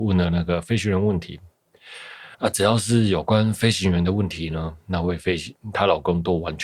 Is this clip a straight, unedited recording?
no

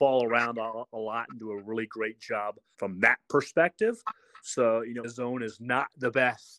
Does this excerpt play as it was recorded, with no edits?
no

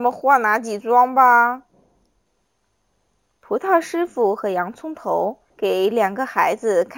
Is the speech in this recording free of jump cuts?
no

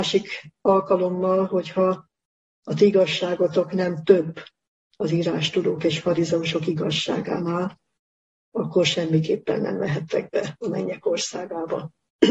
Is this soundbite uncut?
yes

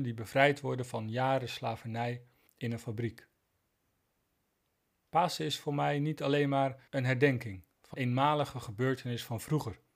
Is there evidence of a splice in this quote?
yes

